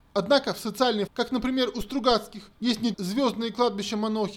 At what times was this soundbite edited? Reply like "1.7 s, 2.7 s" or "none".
1.1 s, 2.5 s, 2.9 s